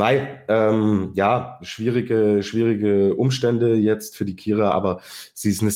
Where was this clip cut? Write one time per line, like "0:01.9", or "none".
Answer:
none